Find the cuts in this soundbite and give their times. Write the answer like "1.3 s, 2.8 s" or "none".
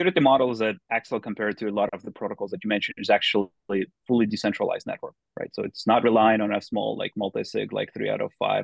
none